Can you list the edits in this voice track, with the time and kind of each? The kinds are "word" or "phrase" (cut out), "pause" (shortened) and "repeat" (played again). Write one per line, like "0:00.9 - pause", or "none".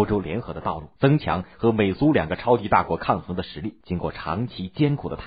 0:01.0 - pause
0:03.8 - pause